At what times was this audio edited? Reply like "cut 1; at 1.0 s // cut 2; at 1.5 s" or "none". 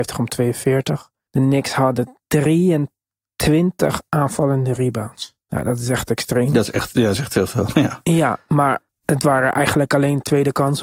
cut 1; at 1.3 s // cut 2; at 5.4 s // cut 3; at 8.9 s